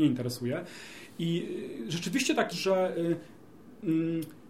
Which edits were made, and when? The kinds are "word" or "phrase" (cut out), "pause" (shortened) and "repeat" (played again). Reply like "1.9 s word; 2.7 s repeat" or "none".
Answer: 2.5 s word